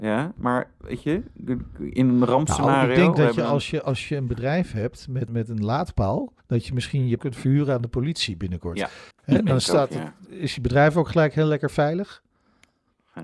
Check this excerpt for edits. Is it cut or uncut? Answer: cut